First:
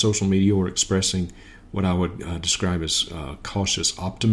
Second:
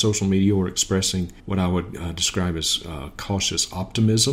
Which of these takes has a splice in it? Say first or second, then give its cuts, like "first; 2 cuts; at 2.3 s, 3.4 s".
second; 1 cut; at 1.4 s